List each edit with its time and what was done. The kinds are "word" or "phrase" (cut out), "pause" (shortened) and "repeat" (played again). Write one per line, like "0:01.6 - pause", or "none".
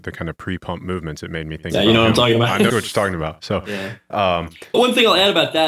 0:02.7 - word
0:04.7 - word